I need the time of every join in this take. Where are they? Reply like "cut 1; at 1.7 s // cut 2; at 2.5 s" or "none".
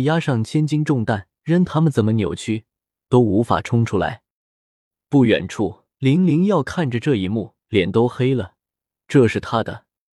cut 1; at 1.4 s // cut 2; at 5.9 s // cut 3; at 7.6 s

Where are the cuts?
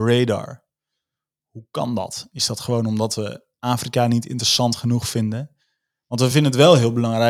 none

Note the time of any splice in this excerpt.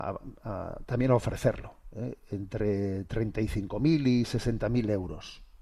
none

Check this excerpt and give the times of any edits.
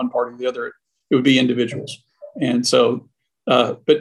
none

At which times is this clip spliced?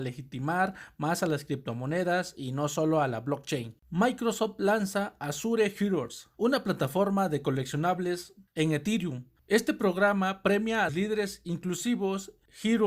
cut 1; at 3.8 s // cut 2; at 10.9 s

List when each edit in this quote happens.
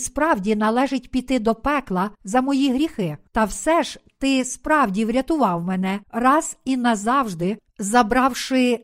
cut 1; at 2.1 s // cut 2; at 3.3 s // cut 3; at 6.0 s // cut 4; at 7.7 s

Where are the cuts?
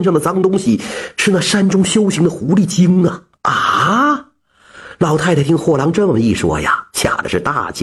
cut 1; at 3.4 s

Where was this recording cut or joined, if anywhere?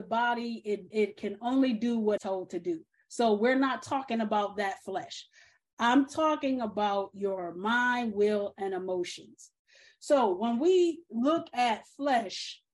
cut 1; at 0.9 s // cut 2; at 2.2 s

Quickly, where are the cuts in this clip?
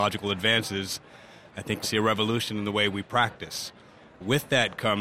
cut 1; at 1.8 s

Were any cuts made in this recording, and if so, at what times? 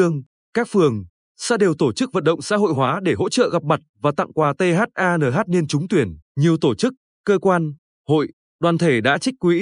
cut 1; at 6.3 s

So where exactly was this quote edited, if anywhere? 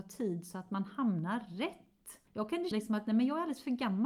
cut 1; at 2.7 s

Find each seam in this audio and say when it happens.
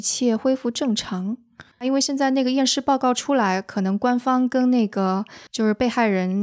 cut 1; at 1.7 s // cut 2; at 5.5 s

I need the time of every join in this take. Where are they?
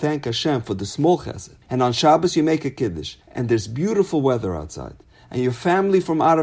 cut 1; at 1.6 s // cut 2; at 3.2 s

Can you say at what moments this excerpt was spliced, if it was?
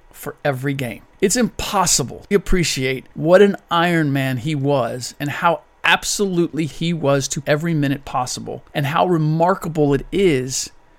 cut 1; at 1.1 s // cut 2; at 2.3 s // cut 3; at 3.1 s // cut 4; at 6.7 s // cut 5; at 7.4 s // cut 6; at 8.7 s

